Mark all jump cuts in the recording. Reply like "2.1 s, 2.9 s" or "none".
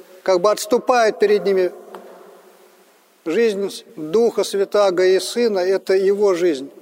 3.9 s